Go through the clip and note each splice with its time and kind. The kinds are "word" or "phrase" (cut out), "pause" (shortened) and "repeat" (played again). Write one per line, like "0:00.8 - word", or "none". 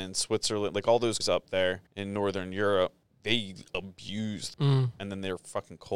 0:01.2 - word
0:01.9 - pause
0:03.0 - word
0:04.5 - word